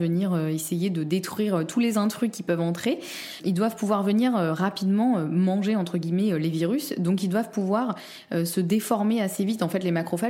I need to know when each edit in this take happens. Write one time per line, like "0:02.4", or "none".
none